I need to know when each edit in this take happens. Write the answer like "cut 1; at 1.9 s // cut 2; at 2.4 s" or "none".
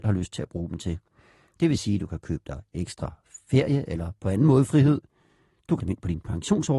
cut 1; at 5.8 s